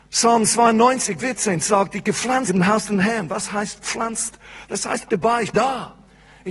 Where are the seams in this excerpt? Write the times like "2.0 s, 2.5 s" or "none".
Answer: 1.2 s, 2.5 s, 5.1 s, 5.5 s